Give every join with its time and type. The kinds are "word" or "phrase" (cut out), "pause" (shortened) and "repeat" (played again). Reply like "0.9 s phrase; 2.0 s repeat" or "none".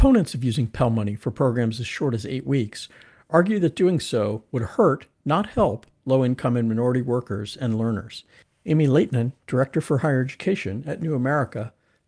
none